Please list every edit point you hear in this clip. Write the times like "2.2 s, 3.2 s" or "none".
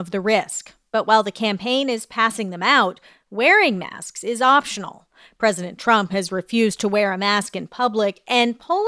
none